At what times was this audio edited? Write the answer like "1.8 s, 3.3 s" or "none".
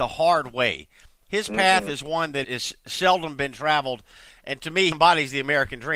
2.4 s, 4.9 s